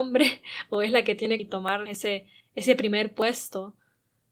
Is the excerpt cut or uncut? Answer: cut